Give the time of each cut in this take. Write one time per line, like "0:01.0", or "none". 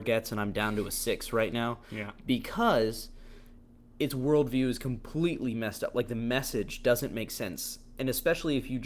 none